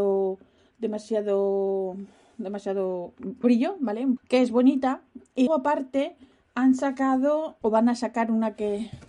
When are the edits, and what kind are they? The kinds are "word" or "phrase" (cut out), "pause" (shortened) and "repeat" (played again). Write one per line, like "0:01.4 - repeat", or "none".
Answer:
0:03.4 - word
0:04.2 - word
0:05.5 - word
0:07.6 - word